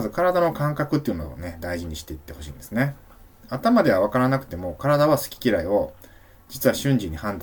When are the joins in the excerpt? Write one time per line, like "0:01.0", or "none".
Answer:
none